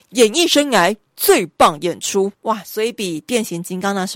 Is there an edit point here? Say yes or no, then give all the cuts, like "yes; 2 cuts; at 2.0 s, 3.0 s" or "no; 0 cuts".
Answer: no; 0 cuts